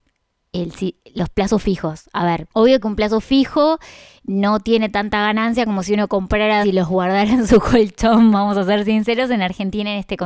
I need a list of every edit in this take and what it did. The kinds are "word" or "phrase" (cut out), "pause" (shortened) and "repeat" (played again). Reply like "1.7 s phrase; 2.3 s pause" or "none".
6.6 s word